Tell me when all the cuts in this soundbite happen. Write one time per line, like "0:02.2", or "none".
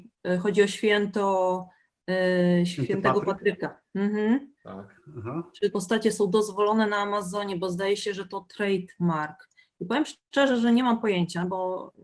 0:04.6
0:05.7
0:10.2